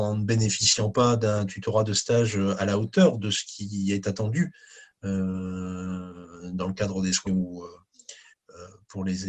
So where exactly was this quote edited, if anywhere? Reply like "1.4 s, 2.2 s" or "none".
7.3 s

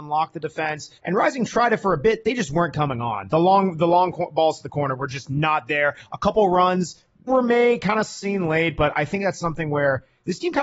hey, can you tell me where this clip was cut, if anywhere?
1.0 s, 7.3 s

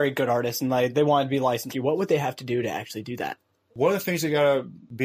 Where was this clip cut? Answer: 1.7 s

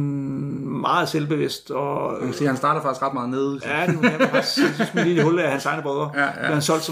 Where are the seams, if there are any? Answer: 3.6 s

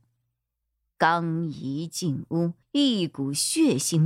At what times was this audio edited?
2.6 s

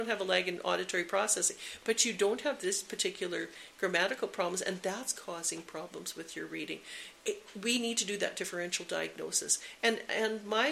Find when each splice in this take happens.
7.2 s

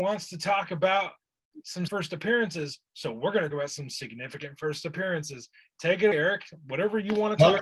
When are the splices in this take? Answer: 1.9 s, 3.5 s, 6.1 s

